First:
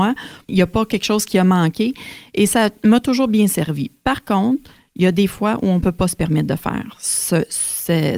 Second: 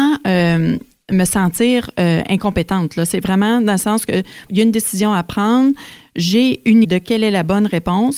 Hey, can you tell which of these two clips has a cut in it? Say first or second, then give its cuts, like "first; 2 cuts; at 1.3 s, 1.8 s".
second; 2 cuts; at 4.5 s, 6.8 s